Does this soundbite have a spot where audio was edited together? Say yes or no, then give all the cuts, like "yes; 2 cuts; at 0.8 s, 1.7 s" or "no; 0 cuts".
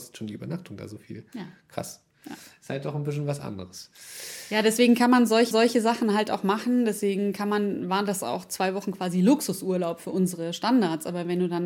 yes; 1 cut; at 5.5 s